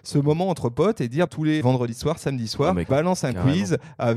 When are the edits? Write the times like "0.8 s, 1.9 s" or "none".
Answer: 1.3 s, 1.6 s, 2.9 s